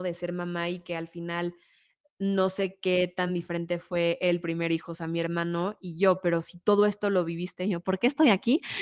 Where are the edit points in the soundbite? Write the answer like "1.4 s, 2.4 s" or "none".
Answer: none